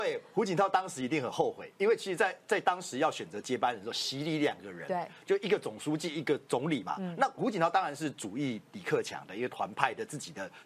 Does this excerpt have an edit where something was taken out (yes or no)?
yes